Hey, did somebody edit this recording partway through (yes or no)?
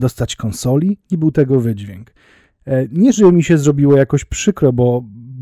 yes